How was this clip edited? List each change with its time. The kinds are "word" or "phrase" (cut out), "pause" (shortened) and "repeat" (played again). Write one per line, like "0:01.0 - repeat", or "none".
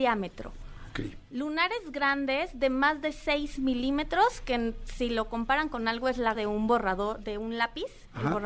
0:06.3 - word

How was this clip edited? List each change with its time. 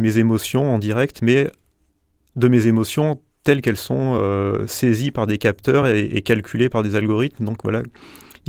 none

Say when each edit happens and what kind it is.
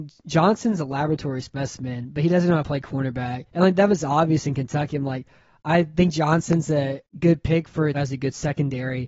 0:03.5 - pause
0:07.9 - phrase

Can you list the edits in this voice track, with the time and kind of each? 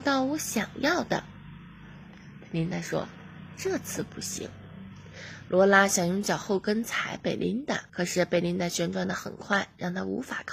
0:07.9 - pause

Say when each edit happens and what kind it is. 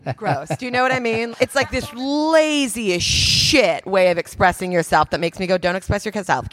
0:01.3 - word

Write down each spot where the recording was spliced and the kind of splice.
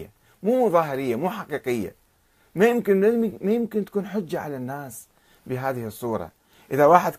none

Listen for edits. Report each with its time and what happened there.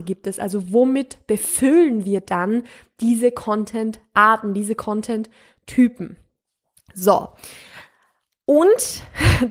none

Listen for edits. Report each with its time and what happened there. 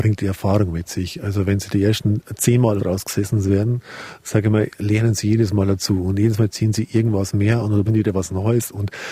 0:02.8 - word
0:07.9 - word

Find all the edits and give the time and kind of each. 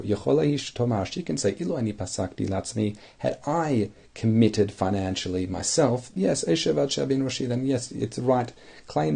0:06.2 - word

